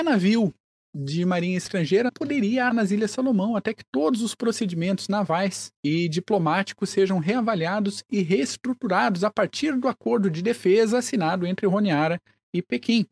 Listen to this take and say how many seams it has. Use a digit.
3